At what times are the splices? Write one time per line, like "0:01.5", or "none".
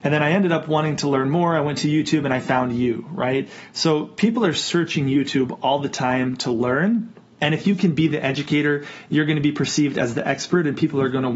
none